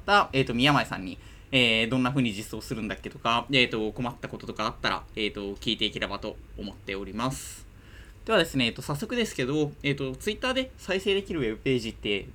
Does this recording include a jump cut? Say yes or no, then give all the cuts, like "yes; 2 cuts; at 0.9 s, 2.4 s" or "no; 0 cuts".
no; 0 cuts